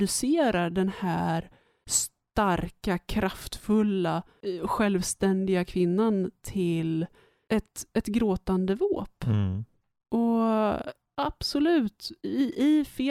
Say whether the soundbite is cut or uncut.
uncut